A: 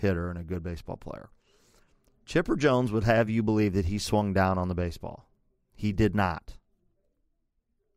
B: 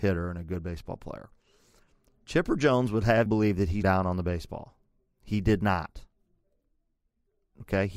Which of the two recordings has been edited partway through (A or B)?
B